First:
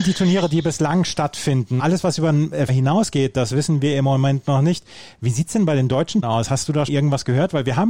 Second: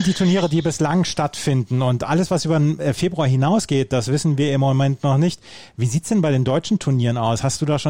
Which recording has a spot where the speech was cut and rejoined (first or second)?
first